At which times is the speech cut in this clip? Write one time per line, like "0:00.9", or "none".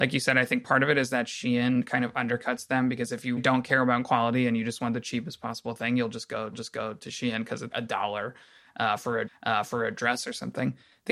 0:03.4
0:06.5
0:07.7
0:09.3